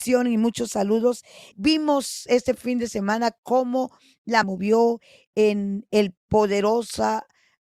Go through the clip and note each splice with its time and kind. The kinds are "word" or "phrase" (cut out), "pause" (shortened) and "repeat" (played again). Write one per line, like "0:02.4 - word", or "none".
0:01.5 - word
0:04.4 - phrase

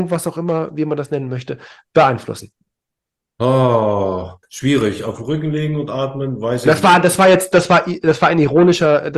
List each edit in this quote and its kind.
0:04.4 - pause

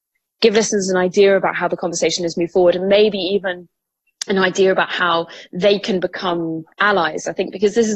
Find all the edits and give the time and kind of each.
0:06.7 - pause

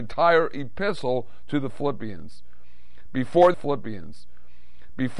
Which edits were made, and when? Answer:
0:03.5 - repeat

